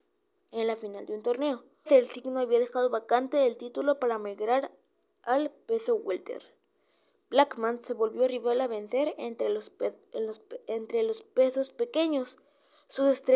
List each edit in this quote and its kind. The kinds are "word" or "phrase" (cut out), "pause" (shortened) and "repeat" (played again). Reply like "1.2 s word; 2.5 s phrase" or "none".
1.9 s word